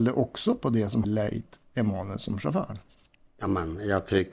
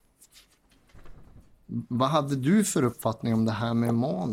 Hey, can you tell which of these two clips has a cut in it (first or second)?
first